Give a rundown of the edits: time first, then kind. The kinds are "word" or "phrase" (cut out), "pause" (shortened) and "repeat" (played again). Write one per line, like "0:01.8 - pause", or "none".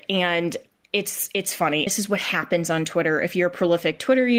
0:01.9 - word